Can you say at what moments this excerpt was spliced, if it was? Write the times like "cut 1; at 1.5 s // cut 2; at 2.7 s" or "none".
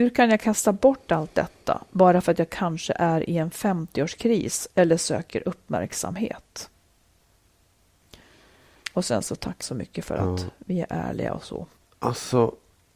cut 1; at 9.6 s // cut 2; at 11.8 s